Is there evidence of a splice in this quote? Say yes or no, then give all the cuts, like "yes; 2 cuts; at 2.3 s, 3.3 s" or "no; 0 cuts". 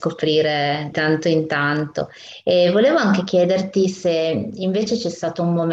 yes; 1 cut; at 0.9 s